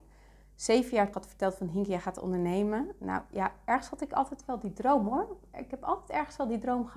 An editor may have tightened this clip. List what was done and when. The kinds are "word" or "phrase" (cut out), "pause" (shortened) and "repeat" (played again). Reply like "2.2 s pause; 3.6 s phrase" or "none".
1.1 s word